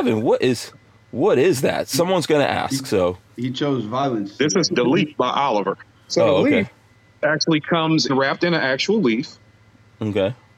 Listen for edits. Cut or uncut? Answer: cut